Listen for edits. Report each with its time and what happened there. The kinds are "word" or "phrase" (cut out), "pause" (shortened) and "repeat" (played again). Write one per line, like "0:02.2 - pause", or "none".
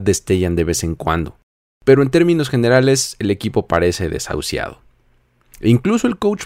none

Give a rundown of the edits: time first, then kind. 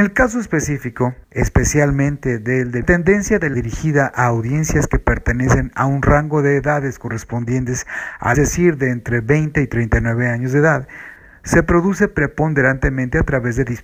0:01.2 - pause
0:02.8 - phrase
0:03.5 - phrase
0:08.3 - phrase

